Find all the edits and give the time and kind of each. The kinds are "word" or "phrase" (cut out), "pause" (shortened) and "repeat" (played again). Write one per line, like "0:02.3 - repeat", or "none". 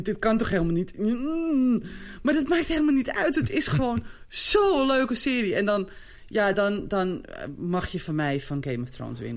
none